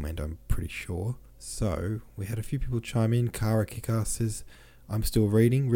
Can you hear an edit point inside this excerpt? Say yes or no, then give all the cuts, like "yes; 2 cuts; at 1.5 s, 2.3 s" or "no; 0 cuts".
yes; 1 cut; at 1.3 s